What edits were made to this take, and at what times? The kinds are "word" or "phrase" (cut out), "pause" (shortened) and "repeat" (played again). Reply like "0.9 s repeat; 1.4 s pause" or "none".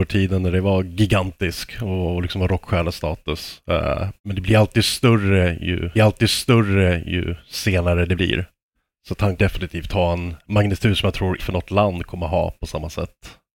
4.2 s pause; 5.9 s repeat; 8.8 s pause; 9.4 s word; 11.4 s phrase